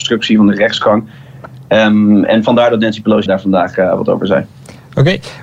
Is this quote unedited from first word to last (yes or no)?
no